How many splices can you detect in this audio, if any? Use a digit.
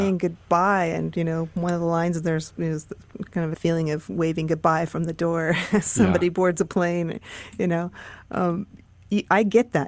1